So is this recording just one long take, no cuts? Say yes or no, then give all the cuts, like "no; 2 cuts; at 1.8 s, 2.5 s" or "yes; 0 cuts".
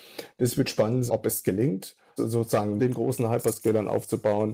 no; 3 cuts; at 1.1 s, 2.2 s, 2.8 s